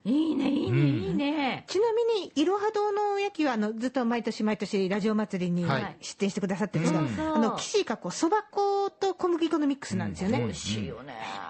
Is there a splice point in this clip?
no; 0 cuts

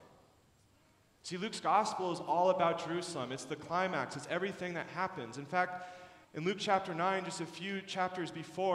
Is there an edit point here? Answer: yes; 1 cut; at 6.2 s

